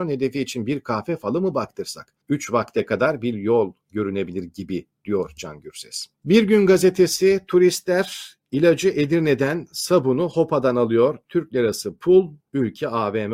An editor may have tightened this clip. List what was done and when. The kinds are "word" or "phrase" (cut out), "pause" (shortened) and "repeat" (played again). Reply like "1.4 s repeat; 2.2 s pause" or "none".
2.2 s pause; 6.1 s pause